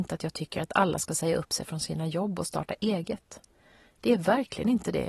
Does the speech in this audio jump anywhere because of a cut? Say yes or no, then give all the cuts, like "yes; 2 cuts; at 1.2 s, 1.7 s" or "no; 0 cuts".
no; 0 cuts